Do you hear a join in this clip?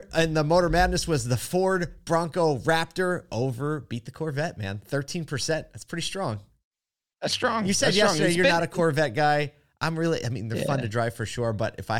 no; 0 cuts

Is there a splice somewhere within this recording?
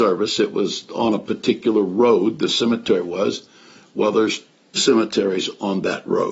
yes; 1 cut; at 4.7 s

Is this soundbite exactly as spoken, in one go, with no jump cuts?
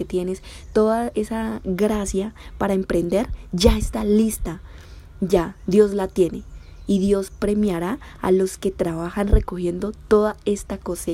no; 1 cut; at 1.1 s

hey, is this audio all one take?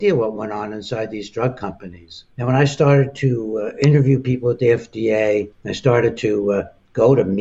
no; 2 cuts; at 2.3 s, 5.5 s

